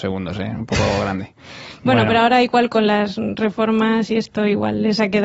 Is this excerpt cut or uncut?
uncut